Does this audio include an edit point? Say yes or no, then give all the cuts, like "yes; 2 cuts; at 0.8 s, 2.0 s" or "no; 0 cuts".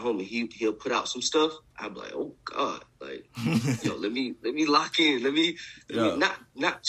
no; 0 cuts